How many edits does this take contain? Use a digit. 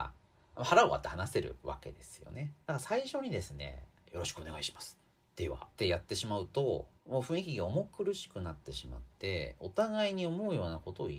3